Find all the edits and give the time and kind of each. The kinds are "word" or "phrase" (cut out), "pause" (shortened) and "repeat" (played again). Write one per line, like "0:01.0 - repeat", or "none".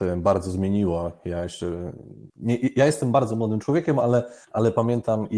0:02.3 - pause
0:04.4 - pause

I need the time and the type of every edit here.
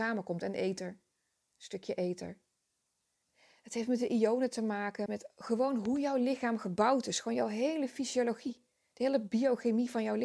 0:05.1 - word

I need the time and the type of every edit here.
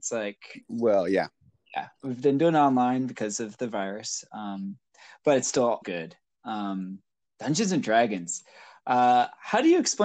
0:05.8 - phrase

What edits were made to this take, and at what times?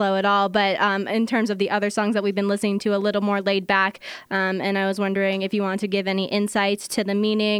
none

